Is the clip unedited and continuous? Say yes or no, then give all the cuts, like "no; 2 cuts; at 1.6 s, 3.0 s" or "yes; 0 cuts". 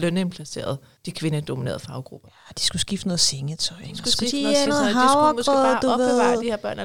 no; 2 cuts; at 1.0 s, 4.7 s